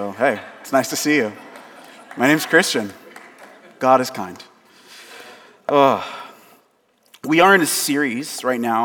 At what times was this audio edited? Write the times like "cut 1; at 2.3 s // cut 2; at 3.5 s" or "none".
none